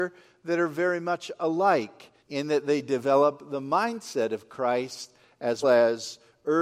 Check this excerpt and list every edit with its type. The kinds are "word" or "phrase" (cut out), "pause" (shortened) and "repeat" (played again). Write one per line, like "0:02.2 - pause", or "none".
0:02.2 - pause
0:05.6 - word